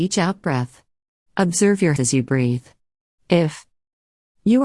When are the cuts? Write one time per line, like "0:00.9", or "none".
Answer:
0:02.0

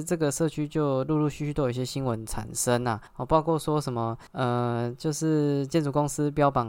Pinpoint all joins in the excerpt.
0:03.1
0:04.3

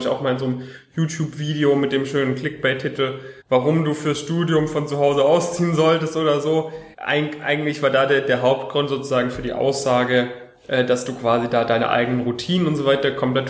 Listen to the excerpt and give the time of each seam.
0:03.4
0:06.9

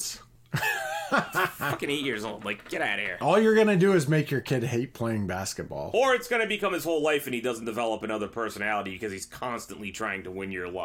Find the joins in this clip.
none

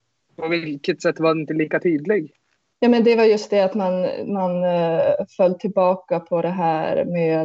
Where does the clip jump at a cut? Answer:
none

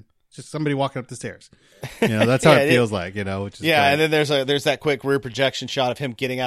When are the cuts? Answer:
none

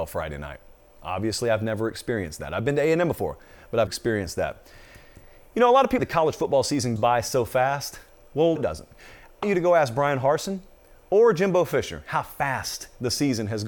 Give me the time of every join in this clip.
0:03.9
0:06.0
0:07.0
0:08.6
0:09.4

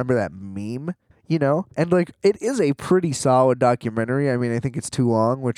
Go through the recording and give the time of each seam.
0:01.1
0:01.7

